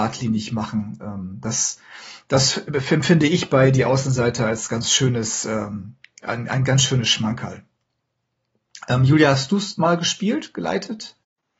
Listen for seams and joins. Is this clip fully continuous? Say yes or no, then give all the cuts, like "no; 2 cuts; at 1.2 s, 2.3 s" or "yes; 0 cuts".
yes; 0 cuts